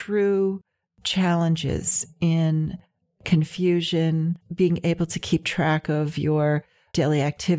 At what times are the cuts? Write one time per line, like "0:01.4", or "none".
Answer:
0:04.4